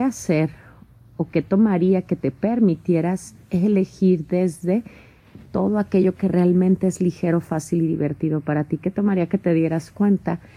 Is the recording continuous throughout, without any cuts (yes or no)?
yes